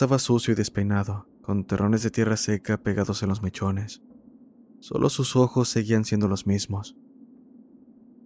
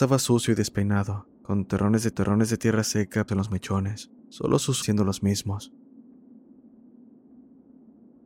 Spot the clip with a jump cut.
second; 4 cuts; at 2.1 s, 3.3 s, 4.2 s, 4.8 s

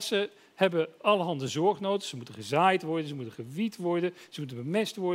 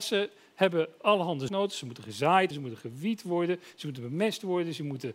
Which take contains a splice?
second; 2 cuts; at 1.5 s, 2.5 s

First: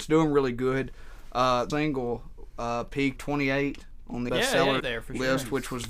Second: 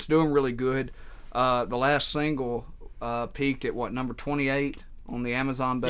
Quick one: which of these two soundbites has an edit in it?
first; 4 cuts; at 1.7 s, 3.2 s, 4.3 s, 4.8 s

